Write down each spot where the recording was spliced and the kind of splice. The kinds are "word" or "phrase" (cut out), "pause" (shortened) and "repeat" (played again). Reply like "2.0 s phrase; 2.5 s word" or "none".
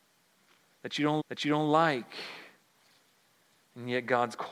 1.2 s repeat